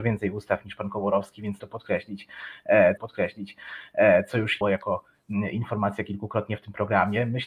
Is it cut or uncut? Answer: cut